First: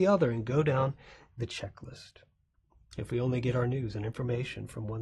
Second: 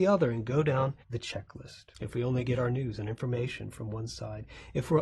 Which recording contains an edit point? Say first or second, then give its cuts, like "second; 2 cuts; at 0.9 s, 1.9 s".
second; 2 cuts; at 1.0 s, 1.9 s